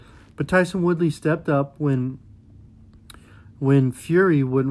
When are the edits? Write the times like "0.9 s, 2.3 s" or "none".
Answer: none